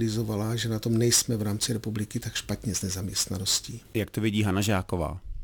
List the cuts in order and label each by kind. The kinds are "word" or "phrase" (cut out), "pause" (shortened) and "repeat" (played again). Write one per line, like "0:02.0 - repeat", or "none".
none